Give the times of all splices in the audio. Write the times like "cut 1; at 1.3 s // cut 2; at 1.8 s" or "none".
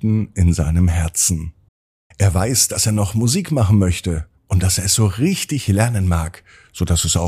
cut 1; at 1.7 s // cut 2; at 4.4 s